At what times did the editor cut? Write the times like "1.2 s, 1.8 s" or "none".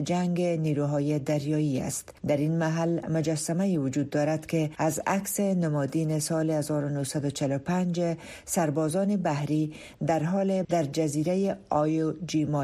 10.6 s